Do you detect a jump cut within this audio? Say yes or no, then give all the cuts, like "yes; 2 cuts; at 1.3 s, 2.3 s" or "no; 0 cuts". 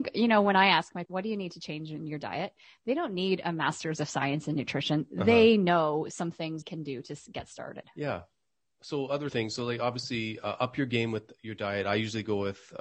yes; 3 cuts; at 1.0 s, 6.6 s, 9.3 s